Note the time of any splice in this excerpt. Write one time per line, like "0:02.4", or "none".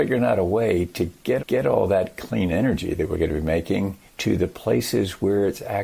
0:01.4
0:04.1